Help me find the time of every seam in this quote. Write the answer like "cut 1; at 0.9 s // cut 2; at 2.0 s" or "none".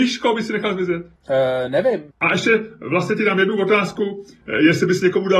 cut 1; at 1.2 s // cut 2; at 2.1 s